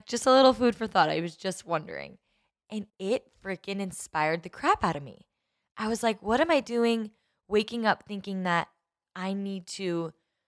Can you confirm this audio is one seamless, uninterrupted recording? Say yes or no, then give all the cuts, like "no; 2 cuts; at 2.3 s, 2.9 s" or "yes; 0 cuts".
no; 1 cut; at 2.9 s